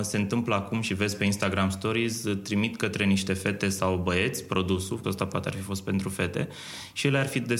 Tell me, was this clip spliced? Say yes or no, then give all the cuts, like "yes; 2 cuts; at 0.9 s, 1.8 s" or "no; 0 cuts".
yes; 1 cut; at 5.0 s